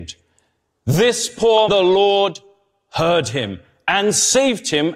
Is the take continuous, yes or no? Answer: no